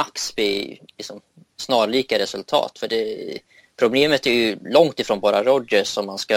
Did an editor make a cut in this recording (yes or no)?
no